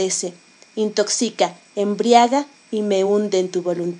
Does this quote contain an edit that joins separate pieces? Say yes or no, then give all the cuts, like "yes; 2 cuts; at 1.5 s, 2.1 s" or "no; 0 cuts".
no; 0 cuts